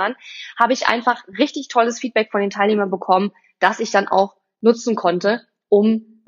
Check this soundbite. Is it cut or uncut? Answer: uncut